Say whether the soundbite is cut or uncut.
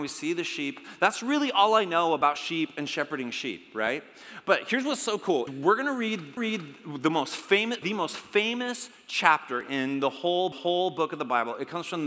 cut